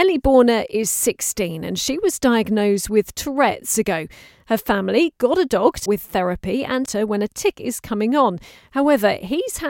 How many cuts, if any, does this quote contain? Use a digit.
4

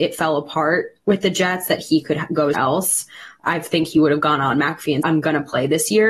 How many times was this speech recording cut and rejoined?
2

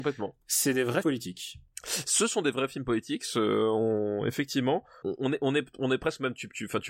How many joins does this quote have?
2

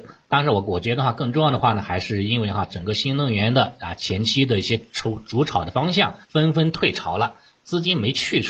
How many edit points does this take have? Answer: 1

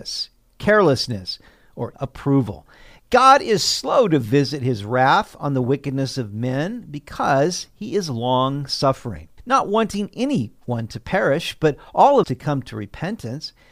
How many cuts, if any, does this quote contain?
3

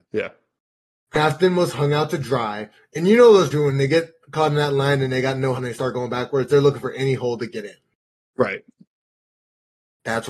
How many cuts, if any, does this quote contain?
2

